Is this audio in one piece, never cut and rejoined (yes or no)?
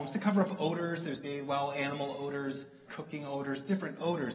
no